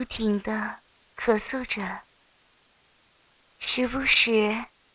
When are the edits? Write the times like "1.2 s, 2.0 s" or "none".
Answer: none